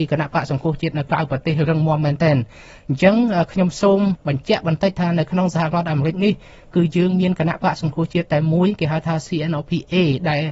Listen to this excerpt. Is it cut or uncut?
uncut